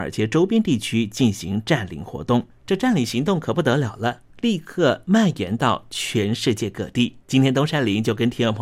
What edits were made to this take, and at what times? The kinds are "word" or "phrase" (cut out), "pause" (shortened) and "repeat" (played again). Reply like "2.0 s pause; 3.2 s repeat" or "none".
2.6 s pause; 4.3 s pause; 7.2 s pause